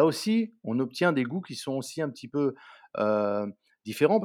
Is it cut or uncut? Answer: uncut